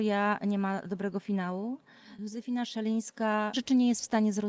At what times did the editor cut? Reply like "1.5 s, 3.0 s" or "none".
3.5 s